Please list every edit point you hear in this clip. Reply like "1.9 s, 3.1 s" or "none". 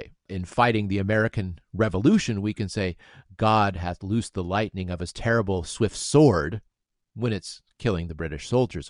none